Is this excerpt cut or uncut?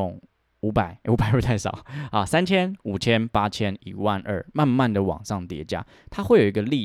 uncut